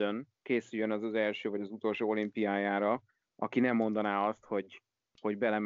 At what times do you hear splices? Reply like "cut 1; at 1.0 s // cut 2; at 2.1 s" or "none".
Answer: none